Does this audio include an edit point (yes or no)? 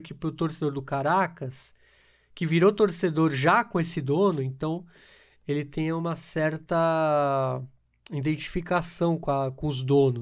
no